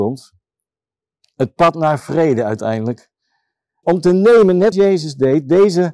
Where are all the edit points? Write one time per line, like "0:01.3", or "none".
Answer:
0:03.8
0:04.7